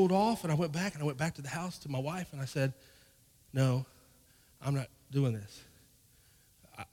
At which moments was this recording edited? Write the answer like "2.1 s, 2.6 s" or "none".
none